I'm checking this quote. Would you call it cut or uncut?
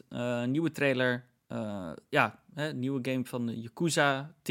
uncut